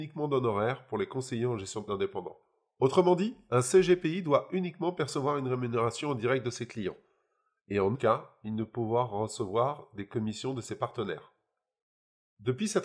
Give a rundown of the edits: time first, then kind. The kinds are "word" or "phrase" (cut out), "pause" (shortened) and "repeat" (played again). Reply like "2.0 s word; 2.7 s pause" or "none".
1.9 s word; 7.9 s word